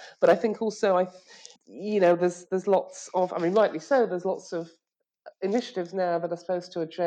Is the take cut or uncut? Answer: cut